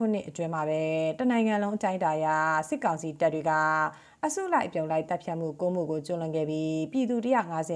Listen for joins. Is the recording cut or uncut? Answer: uncut